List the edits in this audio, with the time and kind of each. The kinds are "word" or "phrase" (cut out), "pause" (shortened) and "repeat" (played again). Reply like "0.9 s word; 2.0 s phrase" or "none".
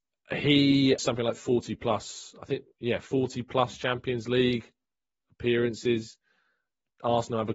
1.0 s word